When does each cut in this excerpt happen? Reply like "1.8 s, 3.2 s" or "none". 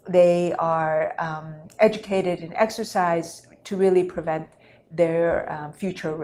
none